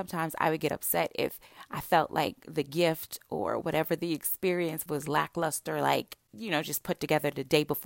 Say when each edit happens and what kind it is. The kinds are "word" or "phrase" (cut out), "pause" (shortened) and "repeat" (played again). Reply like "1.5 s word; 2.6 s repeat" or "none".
4.9 s word